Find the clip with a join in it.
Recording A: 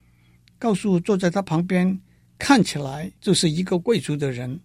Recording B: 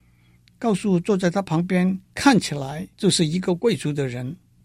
B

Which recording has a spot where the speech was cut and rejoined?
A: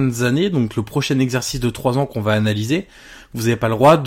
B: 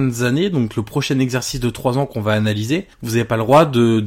B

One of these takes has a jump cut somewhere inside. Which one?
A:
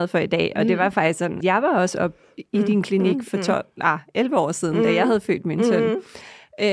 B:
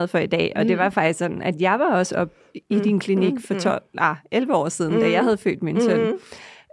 A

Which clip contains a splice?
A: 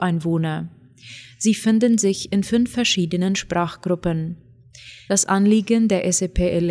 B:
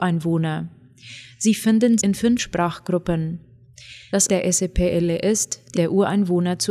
B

